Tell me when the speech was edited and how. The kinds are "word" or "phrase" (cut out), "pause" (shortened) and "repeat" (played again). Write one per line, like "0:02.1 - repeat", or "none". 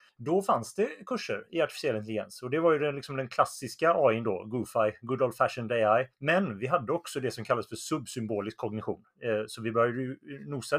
0:06.1 - pause